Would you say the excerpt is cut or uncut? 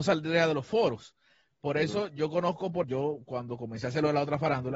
cut